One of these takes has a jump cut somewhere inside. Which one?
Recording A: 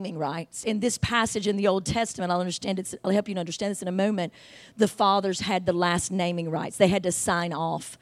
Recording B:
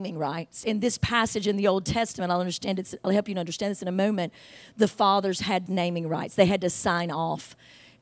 B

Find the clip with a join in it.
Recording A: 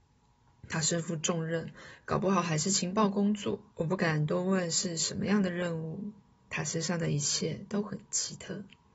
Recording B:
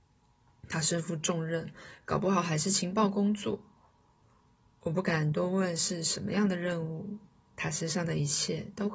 A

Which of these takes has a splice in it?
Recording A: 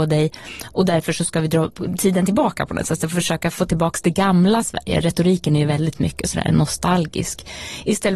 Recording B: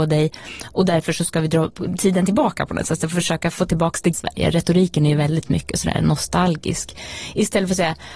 B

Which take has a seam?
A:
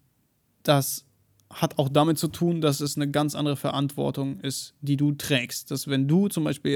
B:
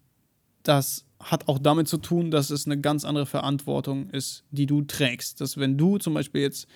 B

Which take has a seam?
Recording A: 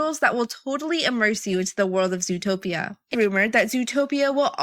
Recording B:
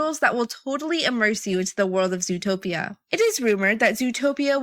A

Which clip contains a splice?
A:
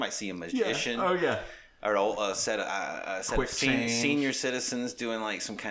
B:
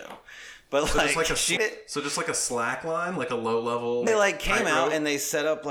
B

